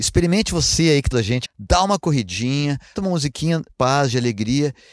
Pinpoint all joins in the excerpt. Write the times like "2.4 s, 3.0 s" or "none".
1.1 s, 1.4 s, 2.9 s, 3.7 s